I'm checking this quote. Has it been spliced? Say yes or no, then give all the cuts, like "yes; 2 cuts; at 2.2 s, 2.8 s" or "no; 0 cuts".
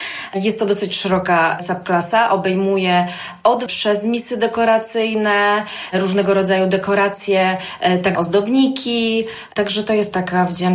yes; 2 cuts; at 3.7 s, 8.1 s